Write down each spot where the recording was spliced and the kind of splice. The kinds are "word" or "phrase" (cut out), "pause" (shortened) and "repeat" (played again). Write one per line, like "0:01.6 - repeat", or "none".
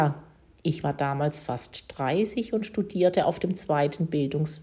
none